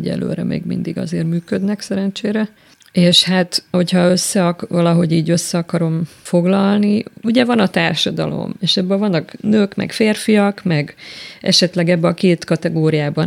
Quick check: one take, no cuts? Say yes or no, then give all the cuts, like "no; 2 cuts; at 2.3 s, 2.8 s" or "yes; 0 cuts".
no; 2 cuts; at 2.6 s, 3.7 s